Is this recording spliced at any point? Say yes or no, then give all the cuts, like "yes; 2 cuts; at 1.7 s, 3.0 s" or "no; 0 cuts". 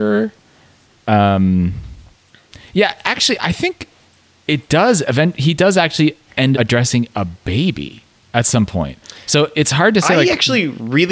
yes; 1 cut; at 6.5 s